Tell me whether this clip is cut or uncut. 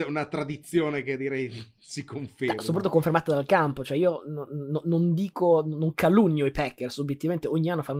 uncut